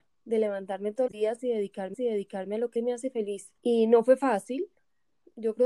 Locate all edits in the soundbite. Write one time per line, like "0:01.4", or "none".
0:01.1
0:01.9
0:02.8
0:03.6